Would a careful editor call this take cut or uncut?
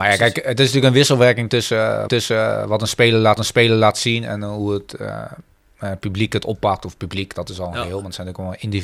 cut